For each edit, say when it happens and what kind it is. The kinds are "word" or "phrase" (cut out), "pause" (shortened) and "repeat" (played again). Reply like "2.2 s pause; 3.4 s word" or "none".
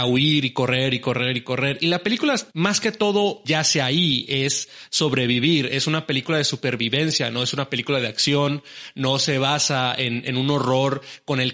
2.5 s pause